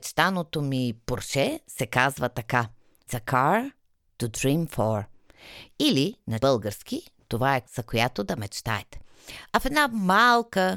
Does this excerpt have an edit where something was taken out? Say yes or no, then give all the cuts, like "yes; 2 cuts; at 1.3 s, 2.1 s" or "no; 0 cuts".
yes; 3 cuts; at 3.1 s, 6.4 s, 7.6 s